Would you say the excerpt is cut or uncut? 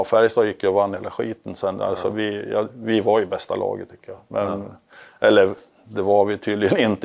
uncut